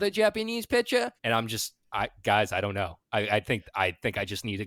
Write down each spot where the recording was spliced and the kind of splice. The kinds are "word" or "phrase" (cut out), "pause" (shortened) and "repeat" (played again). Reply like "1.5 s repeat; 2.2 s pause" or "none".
1.2 s pause